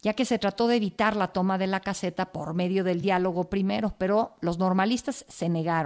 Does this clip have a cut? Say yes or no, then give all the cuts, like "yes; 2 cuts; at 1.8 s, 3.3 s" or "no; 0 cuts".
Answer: no; 0 cuts